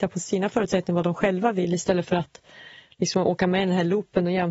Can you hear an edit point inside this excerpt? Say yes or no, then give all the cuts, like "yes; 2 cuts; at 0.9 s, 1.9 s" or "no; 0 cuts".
no; 0 cuts